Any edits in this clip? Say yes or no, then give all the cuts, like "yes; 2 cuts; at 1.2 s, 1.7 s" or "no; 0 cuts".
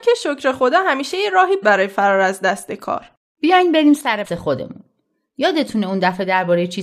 yes; 2 cuts; at 1.6 s, 4.2 s